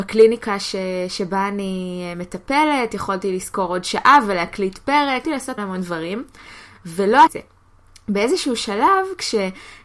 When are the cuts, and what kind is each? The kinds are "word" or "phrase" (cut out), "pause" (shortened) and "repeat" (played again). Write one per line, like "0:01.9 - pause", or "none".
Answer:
0:05.2 - word
0:05.6 - word
0:07.3 - word